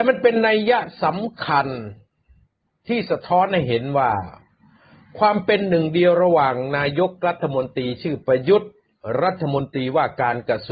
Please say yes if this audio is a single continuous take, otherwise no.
yes